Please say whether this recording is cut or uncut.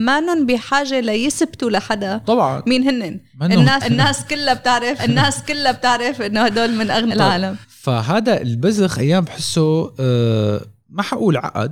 cut